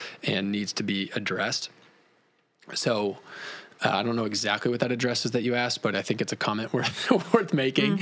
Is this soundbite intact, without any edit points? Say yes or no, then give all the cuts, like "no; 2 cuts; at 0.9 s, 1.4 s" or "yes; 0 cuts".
yes; 0 cuts